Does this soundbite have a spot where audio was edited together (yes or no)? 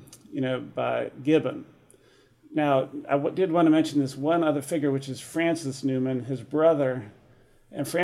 no